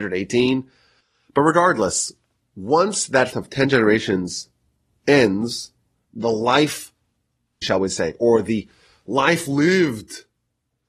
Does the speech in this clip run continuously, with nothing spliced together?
no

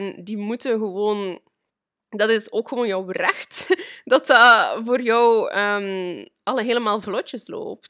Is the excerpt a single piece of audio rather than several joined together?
yes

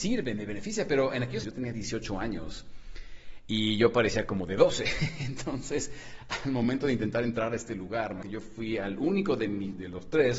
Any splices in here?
yes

